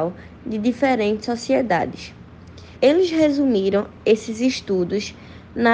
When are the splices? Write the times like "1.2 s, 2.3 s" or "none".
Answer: 2.8 s